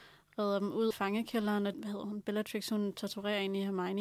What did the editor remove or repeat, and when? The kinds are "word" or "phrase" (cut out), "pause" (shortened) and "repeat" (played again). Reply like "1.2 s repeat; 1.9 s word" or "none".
0.9 s word; 1.7 s phrase